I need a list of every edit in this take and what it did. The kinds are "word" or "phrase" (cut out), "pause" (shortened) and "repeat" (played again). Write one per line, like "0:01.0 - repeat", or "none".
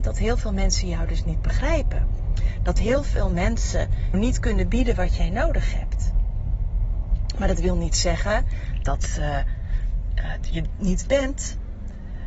0:04.1 - word
0:11.1 - phrase